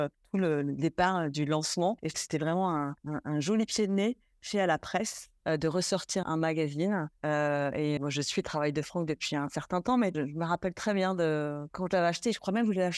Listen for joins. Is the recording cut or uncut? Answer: cut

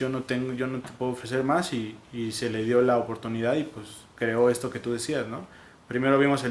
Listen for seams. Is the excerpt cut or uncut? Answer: uncut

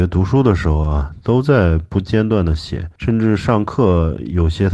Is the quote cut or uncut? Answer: cut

